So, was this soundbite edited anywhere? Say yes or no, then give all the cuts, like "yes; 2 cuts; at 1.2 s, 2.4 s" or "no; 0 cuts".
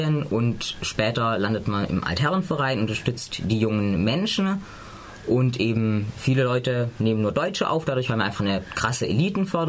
no; 0 cuts